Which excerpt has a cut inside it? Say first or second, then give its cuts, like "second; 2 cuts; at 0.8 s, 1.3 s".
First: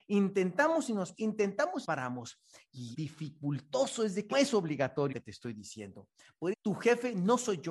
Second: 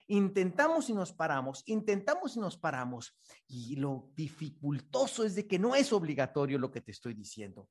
first; 6 cuts; at 1.1 s, 1.8 s, 2.9 s, 4.3 s, 5.1 s, 6.5 s